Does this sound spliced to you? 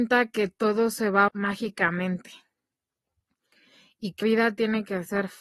yes; 2 cuts; at 1.3 s, 4.2 s

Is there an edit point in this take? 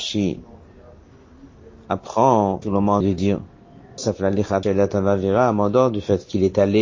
yes; 4 cuts; at 2.6 s, 3.0 s, 4.0 s, 4.6 s

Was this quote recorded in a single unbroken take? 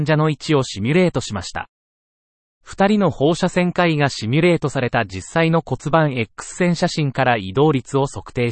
yes; 0 cuts

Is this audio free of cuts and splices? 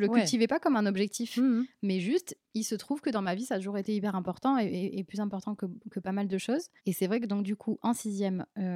no; 1 cut; at 6.8 s

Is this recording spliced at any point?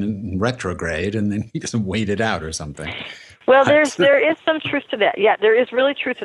no; 0 cuts

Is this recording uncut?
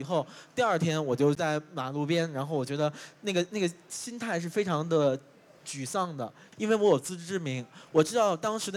yes; 0 cuts

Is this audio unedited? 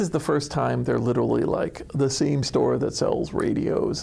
yes; 0 cuts

